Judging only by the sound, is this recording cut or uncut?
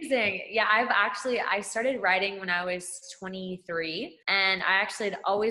cut